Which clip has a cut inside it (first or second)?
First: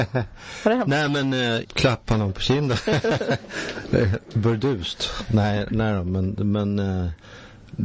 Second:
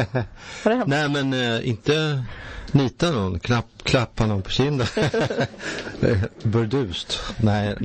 first